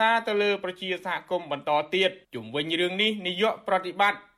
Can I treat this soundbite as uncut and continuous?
no; 1 cut; at 2.2 s

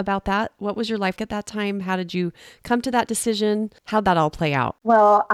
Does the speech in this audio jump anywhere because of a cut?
yes; 1 cut; at 1.2 s

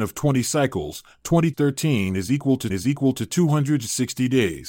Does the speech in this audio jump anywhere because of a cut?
yes; 2 cuts; at 1.5 s, 2.7 s

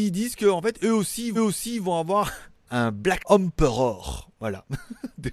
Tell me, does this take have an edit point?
yes; 3 cuts; at 1.3 s, 2.6 s, 3.2 s

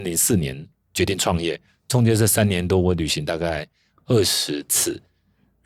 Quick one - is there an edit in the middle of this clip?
no; 0 cuts

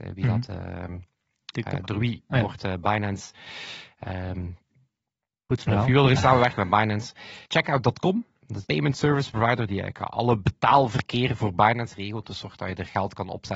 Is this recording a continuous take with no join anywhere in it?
no; 3 cuts; at 6.1 s, 7.4 s, 8.6 s

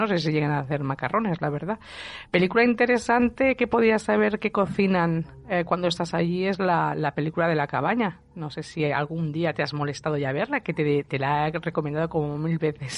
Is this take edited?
yes; 1 cut; at 2.3 s

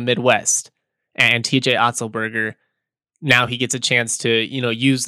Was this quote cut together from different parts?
no; 0 cuts

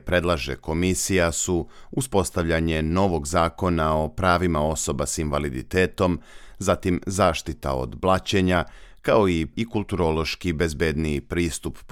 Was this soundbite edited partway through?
yes; 1 cut; at 9.5 s

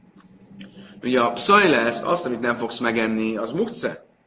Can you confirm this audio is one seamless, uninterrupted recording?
yes; 0 cuts

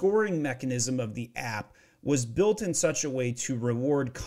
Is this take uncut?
yes; 0 cuts

